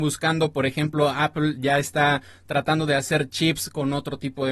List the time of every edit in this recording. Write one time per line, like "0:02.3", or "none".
none